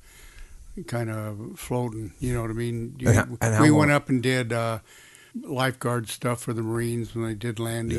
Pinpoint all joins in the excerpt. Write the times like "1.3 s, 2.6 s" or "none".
5.3 s